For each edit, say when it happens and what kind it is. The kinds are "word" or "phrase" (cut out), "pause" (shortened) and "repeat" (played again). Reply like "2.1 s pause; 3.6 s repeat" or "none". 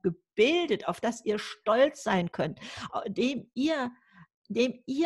none